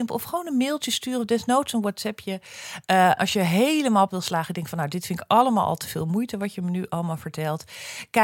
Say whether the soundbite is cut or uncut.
cut